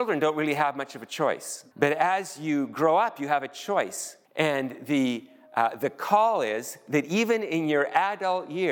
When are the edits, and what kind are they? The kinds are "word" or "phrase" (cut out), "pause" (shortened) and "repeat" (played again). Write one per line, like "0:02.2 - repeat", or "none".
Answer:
0:01.7 - pause
0:04.2 - pause